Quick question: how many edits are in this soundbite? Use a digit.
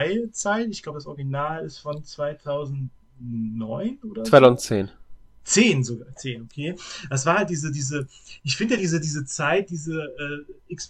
0